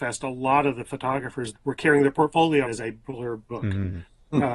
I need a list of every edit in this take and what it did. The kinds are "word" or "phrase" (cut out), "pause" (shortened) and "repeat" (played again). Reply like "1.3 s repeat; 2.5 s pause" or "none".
1.5 s word; 2.6 s word; 3.5 s word

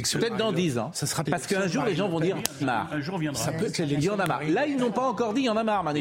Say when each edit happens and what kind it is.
1.3 s word; 2.6 s phrase

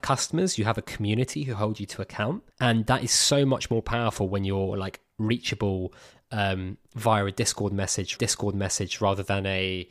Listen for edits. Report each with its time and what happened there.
2.5 s pause; 8.2 s repeat

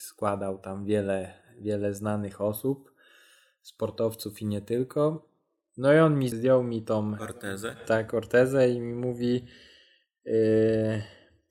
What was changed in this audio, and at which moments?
6.3 s word

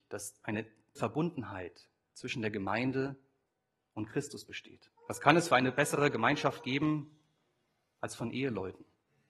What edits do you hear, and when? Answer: 1.0 s word; 5.0 s pause

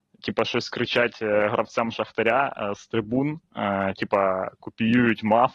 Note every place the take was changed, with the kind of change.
none

